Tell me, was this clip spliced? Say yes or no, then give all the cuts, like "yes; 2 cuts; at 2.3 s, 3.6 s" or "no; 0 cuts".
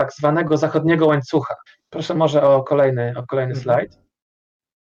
yes; 1 cut; at 1.7 s